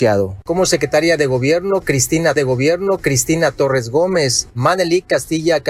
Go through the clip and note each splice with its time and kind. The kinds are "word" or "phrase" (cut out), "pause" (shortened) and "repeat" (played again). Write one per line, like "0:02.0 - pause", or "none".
0:02.4 - repeat